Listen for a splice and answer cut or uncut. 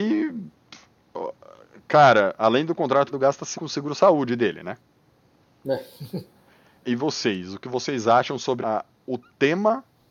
cut